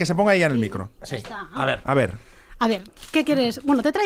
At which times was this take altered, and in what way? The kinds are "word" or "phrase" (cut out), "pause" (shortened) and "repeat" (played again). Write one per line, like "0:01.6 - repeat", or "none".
none